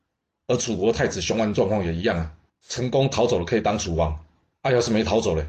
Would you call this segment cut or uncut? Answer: cut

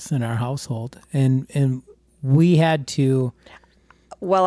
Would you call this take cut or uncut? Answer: uncut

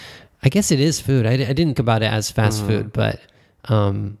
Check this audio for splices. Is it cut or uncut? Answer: cut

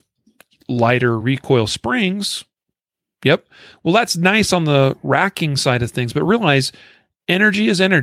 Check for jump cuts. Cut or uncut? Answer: uncut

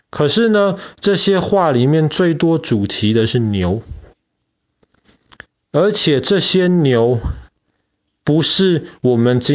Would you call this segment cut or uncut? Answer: uncut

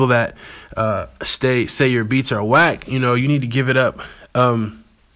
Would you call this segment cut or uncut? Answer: uncut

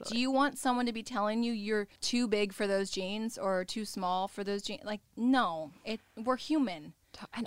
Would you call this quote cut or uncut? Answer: cut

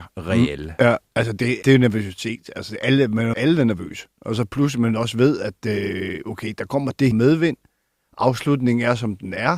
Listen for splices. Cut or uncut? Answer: cut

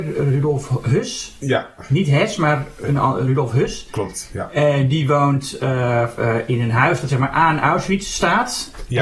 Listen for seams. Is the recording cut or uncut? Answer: uncut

